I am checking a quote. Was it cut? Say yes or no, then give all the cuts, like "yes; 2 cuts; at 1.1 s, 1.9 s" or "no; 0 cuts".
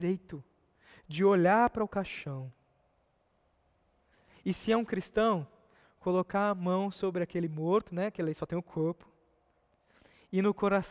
no; 0 cuts